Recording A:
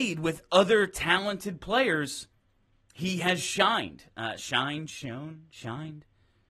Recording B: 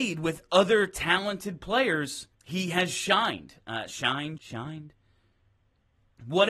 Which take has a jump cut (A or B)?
B